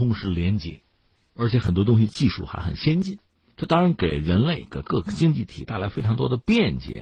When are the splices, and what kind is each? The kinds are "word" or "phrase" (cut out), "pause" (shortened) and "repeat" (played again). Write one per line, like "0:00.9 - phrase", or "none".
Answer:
0:03.3 - pause